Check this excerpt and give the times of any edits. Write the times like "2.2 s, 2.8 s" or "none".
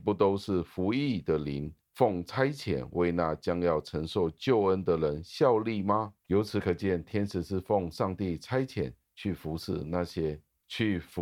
6.2 s